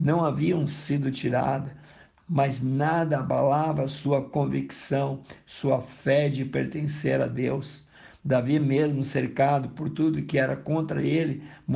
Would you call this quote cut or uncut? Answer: uncut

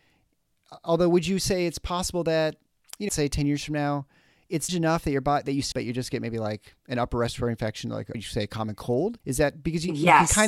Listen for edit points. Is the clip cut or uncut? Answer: cut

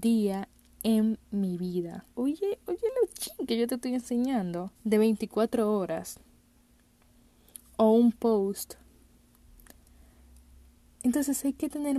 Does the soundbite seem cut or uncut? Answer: cut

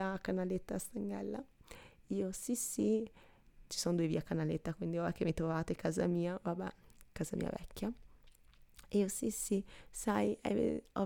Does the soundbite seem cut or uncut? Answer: uncut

